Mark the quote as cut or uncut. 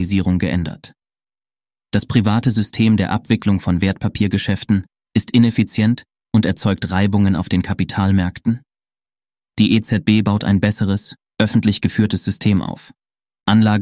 uncut